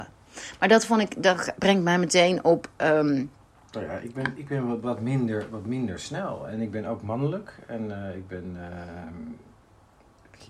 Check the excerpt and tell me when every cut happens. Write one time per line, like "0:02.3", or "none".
none